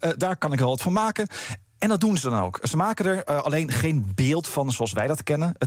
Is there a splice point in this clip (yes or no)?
no